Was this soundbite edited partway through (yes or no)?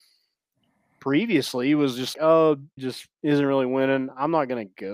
yes